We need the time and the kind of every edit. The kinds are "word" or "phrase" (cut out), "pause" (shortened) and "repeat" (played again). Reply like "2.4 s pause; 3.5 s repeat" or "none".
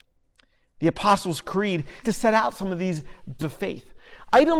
2.0 s word; 3.4 s phrase